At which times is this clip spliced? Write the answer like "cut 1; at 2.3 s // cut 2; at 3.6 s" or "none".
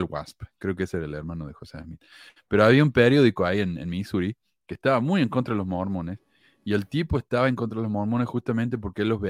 none